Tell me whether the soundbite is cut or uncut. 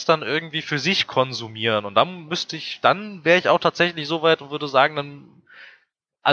uncut